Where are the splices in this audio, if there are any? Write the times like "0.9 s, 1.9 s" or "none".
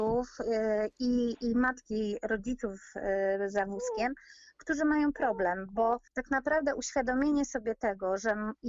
6.1 s